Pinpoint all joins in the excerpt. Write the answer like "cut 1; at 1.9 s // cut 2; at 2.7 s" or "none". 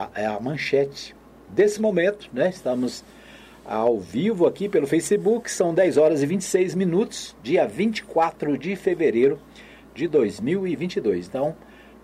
none